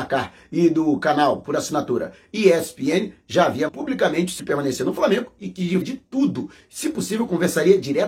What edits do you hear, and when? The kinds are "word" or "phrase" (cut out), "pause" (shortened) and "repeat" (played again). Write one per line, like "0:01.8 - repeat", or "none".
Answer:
0:03.7 - word
0:04.4 - word
0:05.8 - word